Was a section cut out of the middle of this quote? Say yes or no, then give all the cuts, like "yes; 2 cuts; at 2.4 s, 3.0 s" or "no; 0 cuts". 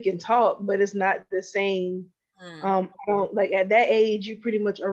no; 0 cuts